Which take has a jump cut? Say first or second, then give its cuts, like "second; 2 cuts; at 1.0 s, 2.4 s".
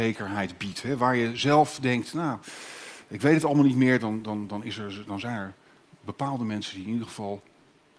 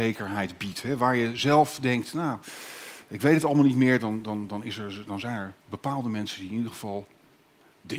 second; 1 cut; at 5.6 s